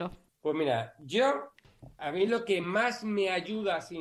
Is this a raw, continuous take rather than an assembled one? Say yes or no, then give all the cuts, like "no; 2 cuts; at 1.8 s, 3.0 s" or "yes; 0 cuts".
yes; 0 cuts